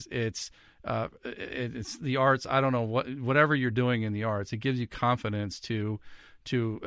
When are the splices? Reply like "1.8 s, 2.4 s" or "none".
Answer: none